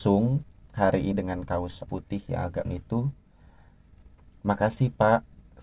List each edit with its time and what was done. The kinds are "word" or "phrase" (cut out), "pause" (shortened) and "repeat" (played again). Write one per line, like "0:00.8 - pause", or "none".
0:01.1 - word
0:01.9 - word
0:02.6 - word

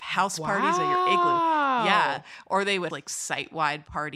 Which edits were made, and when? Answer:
0:02.9 - word

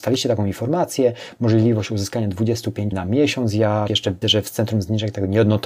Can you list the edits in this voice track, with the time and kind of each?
0:02.9 - word
0:03.9 - word
0:04.2 - word

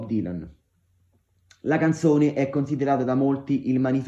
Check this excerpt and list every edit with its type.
none

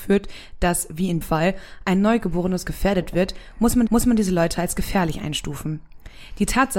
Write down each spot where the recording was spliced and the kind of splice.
0:01.2 - word
0:03.9 - repeat

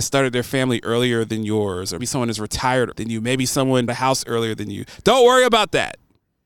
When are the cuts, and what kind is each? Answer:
0:02.0 - word
0:02.9 - word
0:03.9 - word

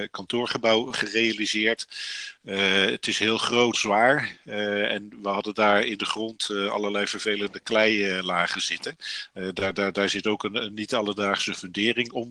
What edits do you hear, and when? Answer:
0:03.7 - word

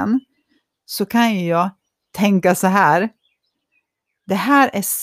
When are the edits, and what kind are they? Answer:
none

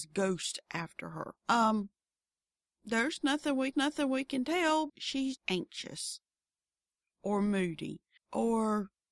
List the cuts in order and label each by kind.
0:01.4 - pause
0:03.7 - repeat
0:04.9 - word
0:05.4 - word
0:08.2 - pause

